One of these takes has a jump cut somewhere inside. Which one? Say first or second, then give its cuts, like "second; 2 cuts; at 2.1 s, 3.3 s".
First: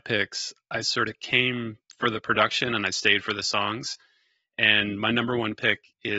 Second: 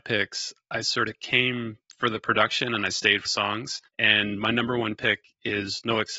second; 2 cuts; at 3.3 s, 3.9 s